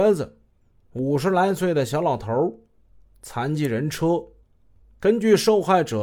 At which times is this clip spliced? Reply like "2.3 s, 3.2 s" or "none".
none